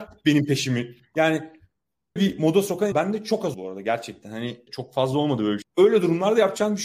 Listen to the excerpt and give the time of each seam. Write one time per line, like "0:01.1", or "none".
0:02.2
0:02.9
0:03.5
0:04.7
0:05.6